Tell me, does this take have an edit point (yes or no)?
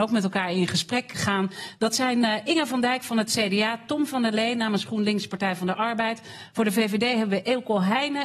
yes